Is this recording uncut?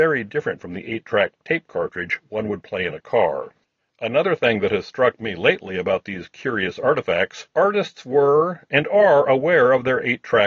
no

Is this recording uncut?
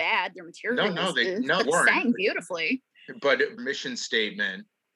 no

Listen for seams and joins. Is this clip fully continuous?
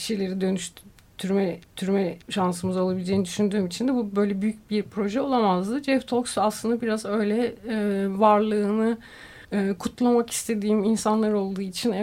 no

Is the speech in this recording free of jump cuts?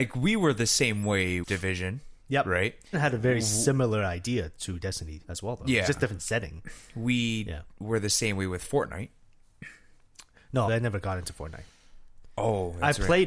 no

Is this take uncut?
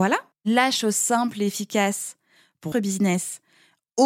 no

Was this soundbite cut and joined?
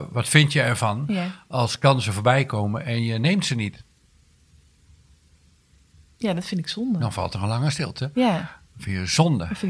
no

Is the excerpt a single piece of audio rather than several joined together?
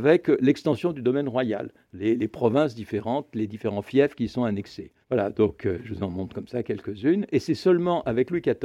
no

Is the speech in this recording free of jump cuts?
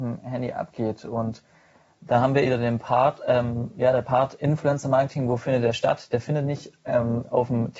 no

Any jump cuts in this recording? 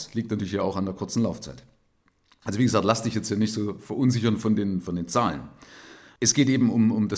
no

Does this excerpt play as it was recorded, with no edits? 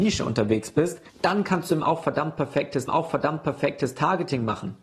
no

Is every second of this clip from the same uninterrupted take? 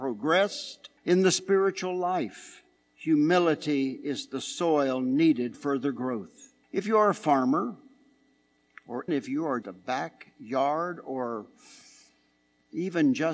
no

